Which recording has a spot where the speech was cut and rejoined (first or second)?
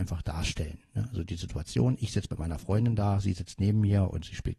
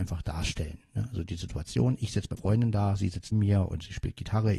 second